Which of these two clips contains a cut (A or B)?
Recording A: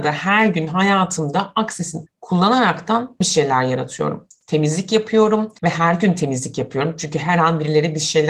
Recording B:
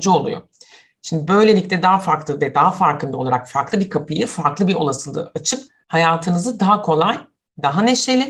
A